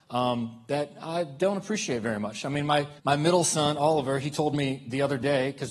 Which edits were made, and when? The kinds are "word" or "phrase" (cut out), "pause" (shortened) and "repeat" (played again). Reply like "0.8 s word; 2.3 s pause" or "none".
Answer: 3.0 s pause